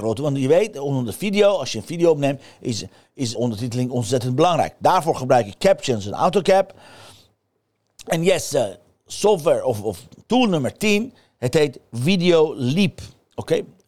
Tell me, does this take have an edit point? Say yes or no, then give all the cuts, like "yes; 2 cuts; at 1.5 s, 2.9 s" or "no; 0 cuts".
yes; 1 cut; at 3.4 s